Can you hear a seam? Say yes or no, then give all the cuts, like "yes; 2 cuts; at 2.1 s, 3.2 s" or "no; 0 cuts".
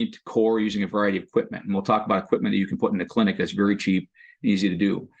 no; 0 cuts